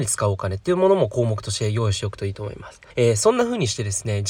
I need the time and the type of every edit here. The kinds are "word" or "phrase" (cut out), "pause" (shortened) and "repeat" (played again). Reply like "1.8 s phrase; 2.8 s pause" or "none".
2.9 s pause